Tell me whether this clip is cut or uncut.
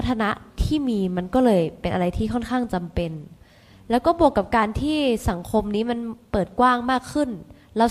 uncut